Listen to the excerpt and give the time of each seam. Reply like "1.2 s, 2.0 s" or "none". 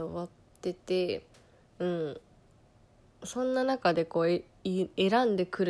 none